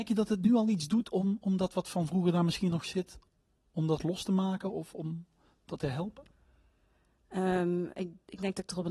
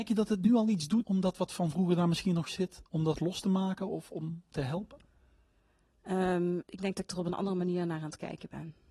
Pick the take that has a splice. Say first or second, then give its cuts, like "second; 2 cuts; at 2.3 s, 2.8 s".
second; 4 cuts; at 1.0 s, 2.9 s, 4.5 s, 6.6 s